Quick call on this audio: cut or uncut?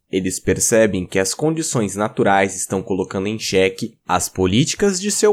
uncut